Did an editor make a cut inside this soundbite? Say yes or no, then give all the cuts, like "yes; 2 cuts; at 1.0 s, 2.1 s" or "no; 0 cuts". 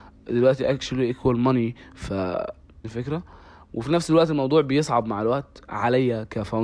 yes; 1 cut; at 2.8 s